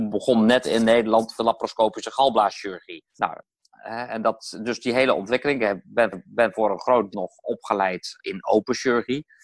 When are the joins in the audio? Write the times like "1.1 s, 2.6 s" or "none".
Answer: 1.4 s, 3.1 s, 6.1 s, 7.1 s